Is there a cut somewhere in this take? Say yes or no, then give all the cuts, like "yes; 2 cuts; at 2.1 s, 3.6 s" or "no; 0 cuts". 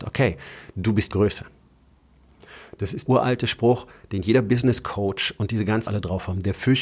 yes; 3 cuts; at 1.1 s, 3.1 s, 5.9 s